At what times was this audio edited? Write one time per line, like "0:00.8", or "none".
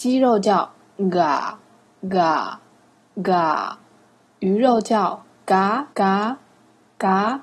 0:05.9